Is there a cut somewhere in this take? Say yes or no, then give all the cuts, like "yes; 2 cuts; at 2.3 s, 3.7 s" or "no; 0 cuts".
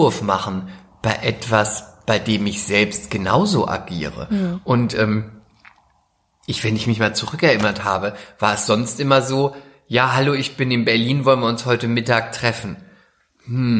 no; 0 cuts